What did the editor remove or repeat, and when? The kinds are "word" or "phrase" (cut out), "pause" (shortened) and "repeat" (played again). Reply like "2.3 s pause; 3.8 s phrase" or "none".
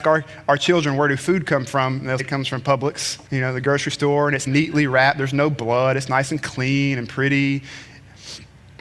2.2 s word; 3.3 s pause; 4.5 s word